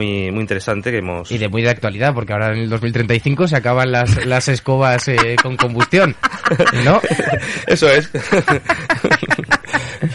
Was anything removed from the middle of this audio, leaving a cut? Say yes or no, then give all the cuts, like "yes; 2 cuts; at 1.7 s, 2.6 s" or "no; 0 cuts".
no; 0 cuts